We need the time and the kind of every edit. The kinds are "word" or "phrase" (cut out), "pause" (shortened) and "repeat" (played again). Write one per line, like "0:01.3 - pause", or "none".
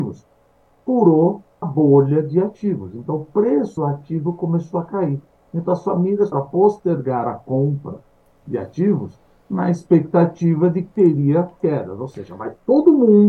0:01.6 - word
0:03.8 - word
0:06.3 - word
0:11.6 - word